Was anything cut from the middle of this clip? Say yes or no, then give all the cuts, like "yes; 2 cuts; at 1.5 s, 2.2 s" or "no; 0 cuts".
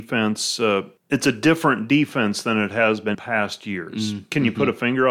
yes; 2 cuts; at 1.0 s, 3.1 s